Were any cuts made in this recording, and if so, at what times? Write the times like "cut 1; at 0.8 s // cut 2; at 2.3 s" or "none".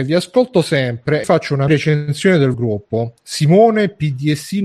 cut 1; at 1.2 s // cut 2; at 1.7 s // cut 3; at 2.5 s